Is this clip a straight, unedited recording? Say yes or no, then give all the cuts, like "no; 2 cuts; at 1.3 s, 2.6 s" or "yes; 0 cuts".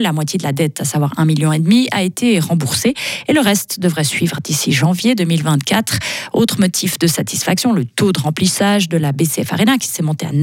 yes; 0 cuts